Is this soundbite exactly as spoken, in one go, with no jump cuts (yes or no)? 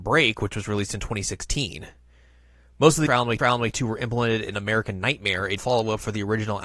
no